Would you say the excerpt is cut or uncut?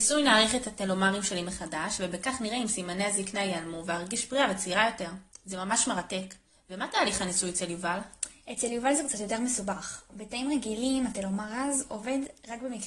uncut